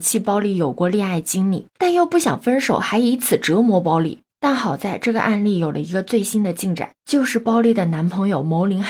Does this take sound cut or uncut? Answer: cut